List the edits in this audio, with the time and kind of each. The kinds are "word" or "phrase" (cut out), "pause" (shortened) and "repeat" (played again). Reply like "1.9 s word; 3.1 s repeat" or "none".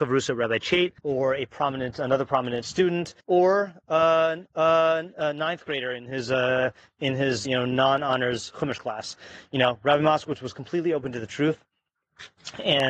1.0 s pause; 3.2 s pause; 4.5 s repeat; 7.4 s word